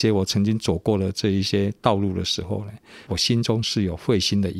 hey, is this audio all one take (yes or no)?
no